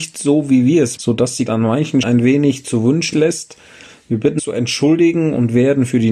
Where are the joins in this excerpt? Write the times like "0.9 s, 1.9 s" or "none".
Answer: 1.0 s, 1.5 s, 2.0 s, 3.1 s, 4.4 s

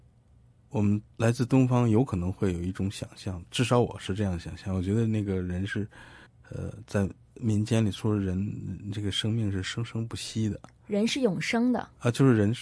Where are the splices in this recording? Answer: 1.1 s, 6.3 s

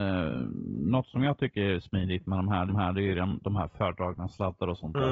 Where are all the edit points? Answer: 2.7 s

